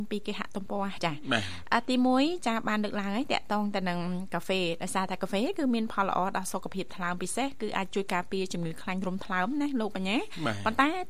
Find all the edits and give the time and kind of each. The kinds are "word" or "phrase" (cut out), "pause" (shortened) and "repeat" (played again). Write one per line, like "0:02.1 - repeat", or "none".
0:01.0 - word